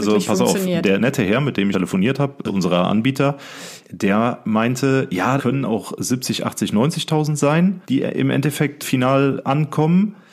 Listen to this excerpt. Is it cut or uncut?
cut